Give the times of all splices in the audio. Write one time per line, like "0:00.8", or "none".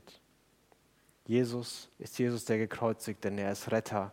0:01.9

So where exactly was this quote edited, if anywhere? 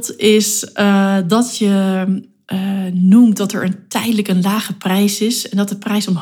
none

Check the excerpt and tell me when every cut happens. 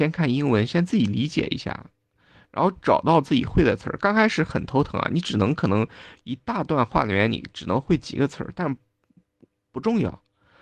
none

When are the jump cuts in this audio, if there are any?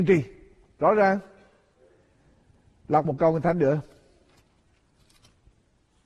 0:03.0

